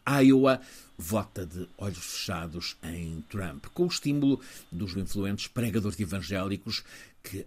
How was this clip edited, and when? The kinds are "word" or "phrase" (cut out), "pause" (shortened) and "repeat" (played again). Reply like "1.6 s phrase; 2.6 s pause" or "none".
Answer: 4.9 s word